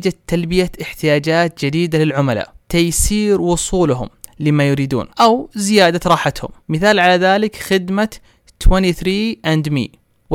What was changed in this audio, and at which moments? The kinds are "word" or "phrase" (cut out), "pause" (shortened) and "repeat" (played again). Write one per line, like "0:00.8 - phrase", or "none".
0:02.6 - pause
0:05.1 - pause
0:06.6 - pause